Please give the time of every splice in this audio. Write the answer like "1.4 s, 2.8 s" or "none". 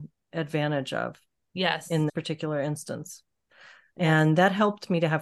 2.1 s